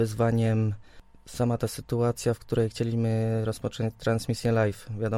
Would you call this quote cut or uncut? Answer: uncut